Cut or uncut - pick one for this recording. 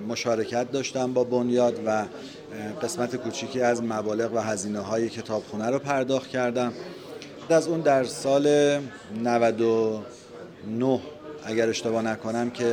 cut